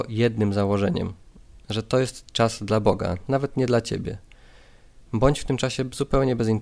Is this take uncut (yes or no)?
yes